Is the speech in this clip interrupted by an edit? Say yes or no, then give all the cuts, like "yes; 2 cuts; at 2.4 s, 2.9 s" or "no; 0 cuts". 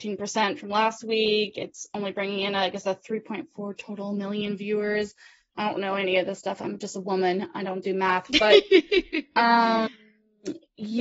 no; 0 cuts